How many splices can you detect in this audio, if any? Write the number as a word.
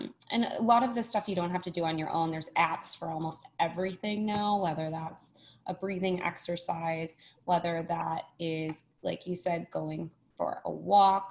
zero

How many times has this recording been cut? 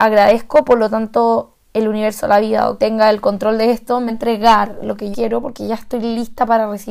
three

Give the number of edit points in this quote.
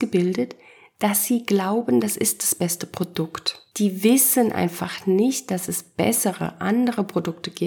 zero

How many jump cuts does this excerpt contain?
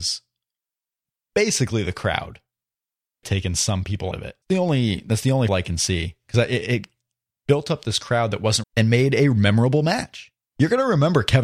five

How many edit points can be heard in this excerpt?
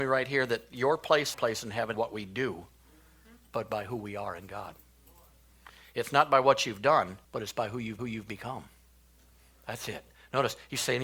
four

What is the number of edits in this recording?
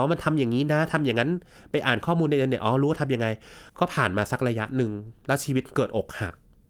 one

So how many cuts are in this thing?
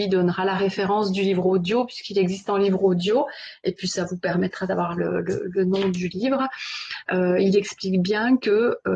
zero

